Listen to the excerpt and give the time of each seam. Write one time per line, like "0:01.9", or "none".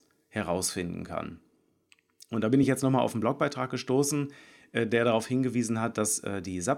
none